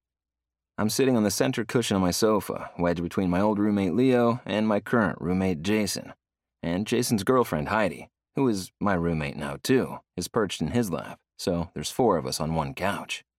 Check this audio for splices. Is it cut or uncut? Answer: cut